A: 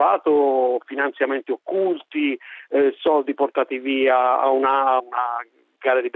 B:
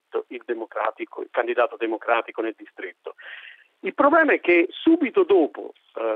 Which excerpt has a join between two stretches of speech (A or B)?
A